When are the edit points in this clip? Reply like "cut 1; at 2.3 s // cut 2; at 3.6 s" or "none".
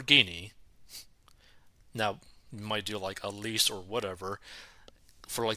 none